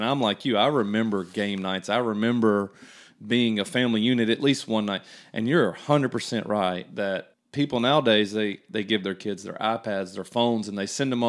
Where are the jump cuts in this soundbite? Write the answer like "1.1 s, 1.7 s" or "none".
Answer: 7.3 s